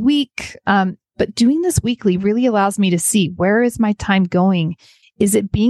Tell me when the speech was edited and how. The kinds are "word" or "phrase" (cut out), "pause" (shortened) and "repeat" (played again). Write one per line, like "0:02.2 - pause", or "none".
none